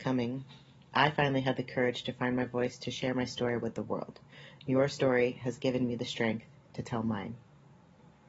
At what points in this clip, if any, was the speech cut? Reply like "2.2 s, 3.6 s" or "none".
none